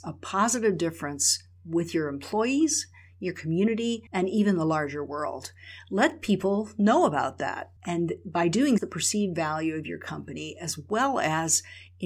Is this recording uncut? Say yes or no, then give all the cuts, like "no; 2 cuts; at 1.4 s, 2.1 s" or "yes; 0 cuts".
no; 3 cuts; at 4.1 s, 7.8 s, 8.8 s